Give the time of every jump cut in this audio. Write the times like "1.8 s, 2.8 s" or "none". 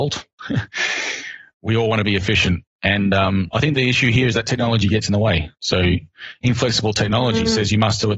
2.7 s, 5.5 s